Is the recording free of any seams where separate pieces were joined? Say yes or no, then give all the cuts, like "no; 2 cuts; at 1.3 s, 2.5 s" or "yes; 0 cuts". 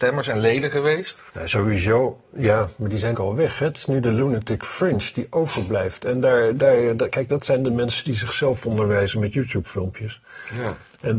no; 3 cuts; at 1.3 s, 3.1 s, 6.6 s